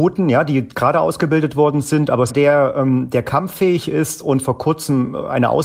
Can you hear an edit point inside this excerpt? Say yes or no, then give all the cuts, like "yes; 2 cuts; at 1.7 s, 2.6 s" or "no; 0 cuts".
yes; 1 cut; at 2.3 s